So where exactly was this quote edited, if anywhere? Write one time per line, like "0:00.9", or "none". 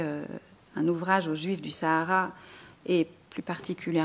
none